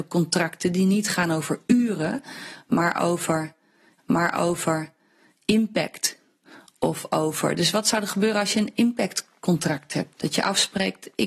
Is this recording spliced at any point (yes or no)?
yes